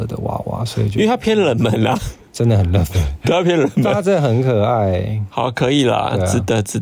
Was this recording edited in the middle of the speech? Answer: no; 0 cuts

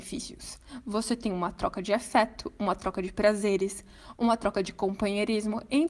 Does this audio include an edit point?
no; 0 cuts

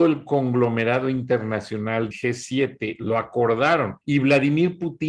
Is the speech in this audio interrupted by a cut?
yes; 2 cuts; at 2.1 s, 4.0 s

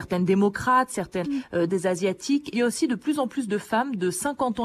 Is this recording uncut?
no; 3 cuts; at 1.2 s, 1.7 s, 2.5 s

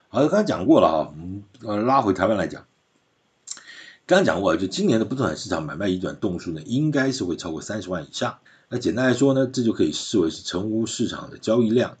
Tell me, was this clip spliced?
yes; 1 cut; at 8.5 s

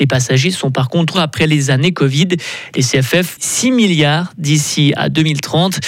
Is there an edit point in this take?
yes; 2 cuts; at 1.1 s, 3.4 s

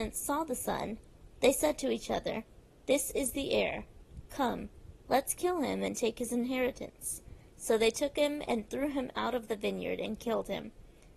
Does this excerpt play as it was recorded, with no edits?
yes; 0 cuts

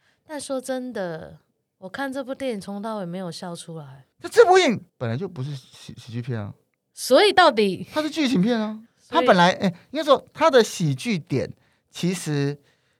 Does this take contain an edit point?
yes; 3 cuts; at 4.1 s, 4.9 s, 8.9 s

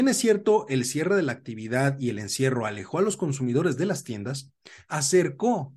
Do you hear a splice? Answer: no; 0 cuts

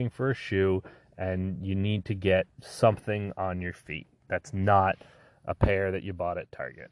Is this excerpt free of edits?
yes; 0 cuts

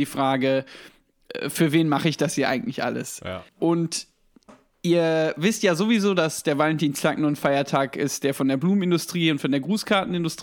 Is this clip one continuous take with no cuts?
yes; 0 cuts

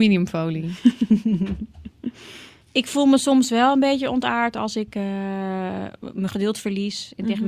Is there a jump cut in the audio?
no; 0 cuts

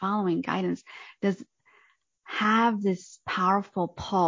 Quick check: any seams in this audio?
no; 0 cuts

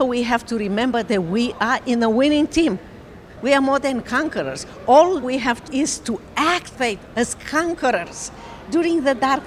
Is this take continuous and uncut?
no; 3 cuts; at 5.2 s, 5.7 s, 6.7 s

